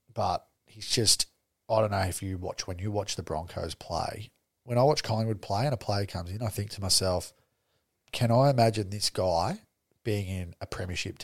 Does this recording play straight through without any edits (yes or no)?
yes